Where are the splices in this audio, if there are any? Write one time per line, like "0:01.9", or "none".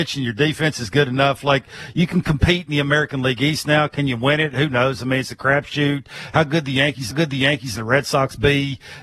0:07.1